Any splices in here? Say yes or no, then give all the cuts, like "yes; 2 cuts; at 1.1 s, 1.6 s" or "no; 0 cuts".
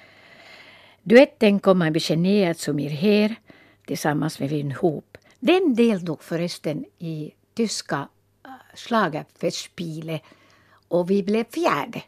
no; 0 cuts